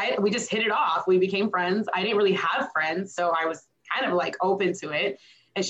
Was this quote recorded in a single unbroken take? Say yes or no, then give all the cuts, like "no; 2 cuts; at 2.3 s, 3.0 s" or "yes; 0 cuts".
yes; 0 cuts